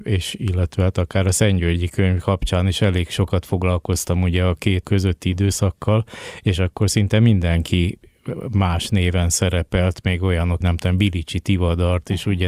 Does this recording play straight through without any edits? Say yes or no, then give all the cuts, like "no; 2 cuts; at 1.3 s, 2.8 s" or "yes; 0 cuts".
no; 2 cuts; at 4.8 s, 10.6 s